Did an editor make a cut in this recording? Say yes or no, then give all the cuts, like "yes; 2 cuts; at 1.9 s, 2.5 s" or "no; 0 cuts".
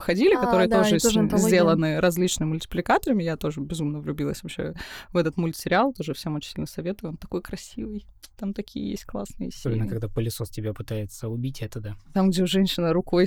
yes; 1 cut; at 8.3 s